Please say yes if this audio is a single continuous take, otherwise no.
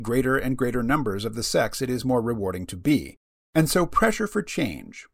yes